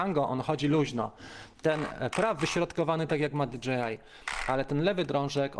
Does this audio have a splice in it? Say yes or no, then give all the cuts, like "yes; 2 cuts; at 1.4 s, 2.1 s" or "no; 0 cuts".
yes; 1 cut; at 2.4 s